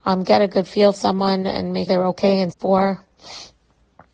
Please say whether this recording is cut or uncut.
cut